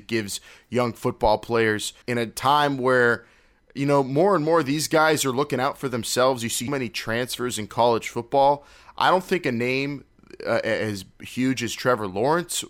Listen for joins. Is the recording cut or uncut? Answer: cut